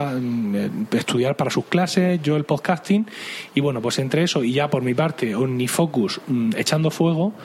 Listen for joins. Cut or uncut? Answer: uncut